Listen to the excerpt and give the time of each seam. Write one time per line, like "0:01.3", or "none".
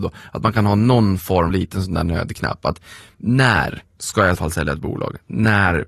0:01.5
0:04.4